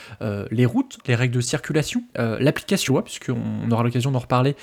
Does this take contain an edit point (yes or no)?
yes